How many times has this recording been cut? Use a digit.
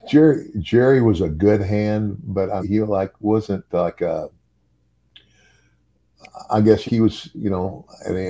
2